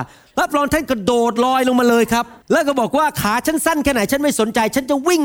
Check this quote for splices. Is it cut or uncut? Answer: cut